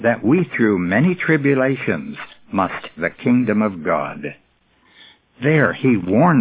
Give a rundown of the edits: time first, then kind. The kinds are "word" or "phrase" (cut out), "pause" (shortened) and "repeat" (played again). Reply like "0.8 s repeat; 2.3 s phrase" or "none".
3.0 s word